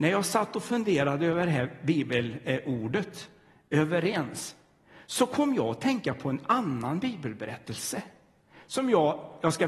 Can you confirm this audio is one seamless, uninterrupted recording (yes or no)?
yes